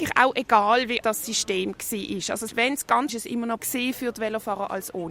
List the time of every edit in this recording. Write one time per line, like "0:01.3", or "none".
0:01.0
0:02.5
0:03.1
0:03.6